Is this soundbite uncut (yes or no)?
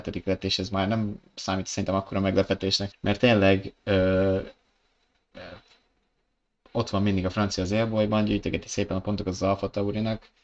no